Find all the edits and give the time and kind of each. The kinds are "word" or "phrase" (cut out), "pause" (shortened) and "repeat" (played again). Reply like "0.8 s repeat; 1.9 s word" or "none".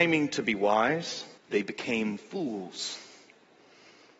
1.4 s pause